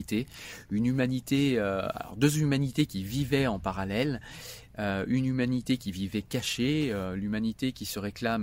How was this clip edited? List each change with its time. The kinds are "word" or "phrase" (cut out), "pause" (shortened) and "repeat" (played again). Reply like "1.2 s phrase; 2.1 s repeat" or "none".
none